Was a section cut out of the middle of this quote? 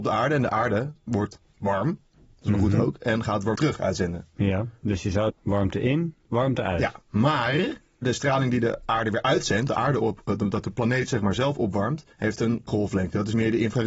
yes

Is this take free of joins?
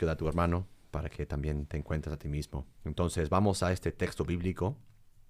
no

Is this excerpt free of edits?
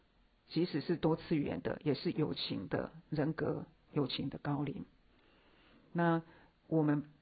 yes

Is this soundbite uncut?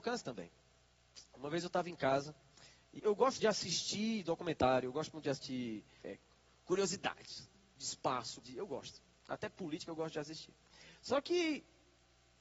no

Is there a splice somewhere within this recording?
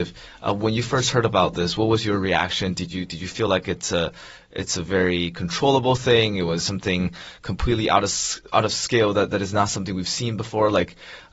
no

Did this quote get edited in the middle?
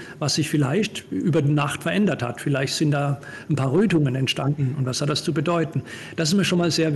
no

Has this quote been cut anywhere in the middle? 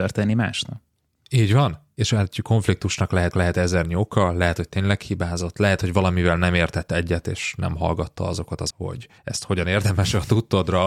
yes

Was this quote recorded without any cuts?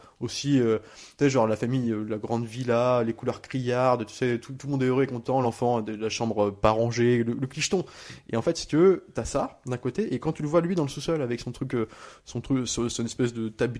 yes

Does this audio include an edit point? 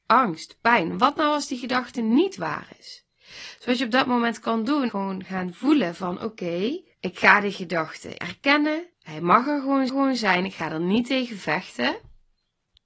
yes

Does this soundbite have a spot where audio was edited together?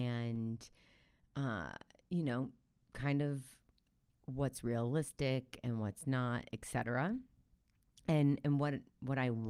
no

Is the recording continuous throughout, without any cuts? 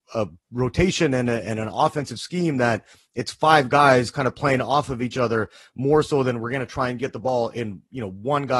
yes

